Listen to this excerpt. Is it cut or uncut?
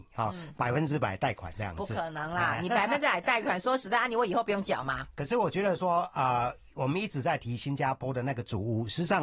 uncut